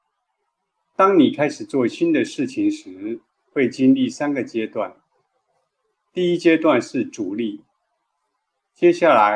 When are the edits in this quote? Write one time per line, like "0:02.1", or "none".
none

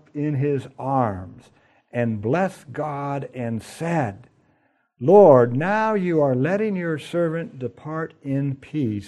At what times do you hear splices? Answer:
none

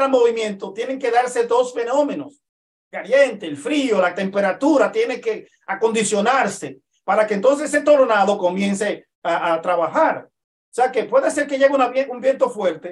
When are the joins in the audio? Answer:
0:09.1

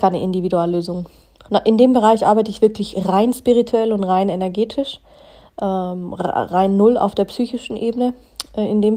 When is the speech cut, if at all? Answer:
none

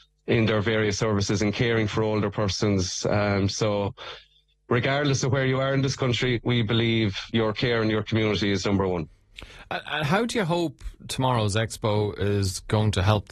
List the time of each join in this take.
0:07.3

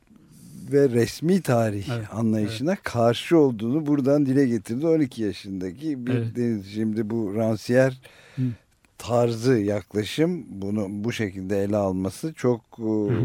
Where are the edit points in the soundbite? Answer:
none

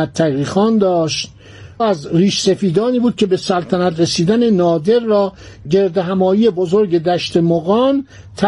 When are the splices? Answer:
0:01.8

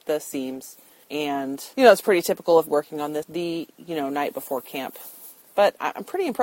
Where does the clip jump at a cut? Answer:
0:01.7
0:02.7
0:03.2

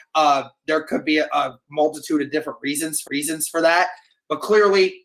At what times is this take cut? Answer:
0:03.1

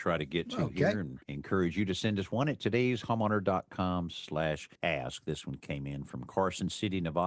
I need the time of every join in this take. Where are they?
0:01.2
0:04.7

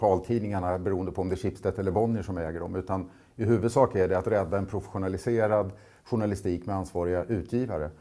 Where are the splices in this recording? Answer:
none

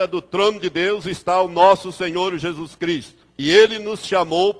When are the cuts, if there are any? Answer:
0:03.3

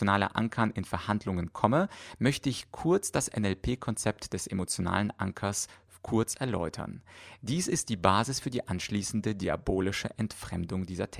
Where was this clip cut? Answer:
none

